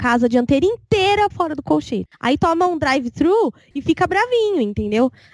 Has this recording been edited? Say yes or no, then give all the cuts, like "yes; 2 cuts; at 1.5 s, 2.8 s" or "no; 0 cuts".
yes; 1 cut; at 1.3 s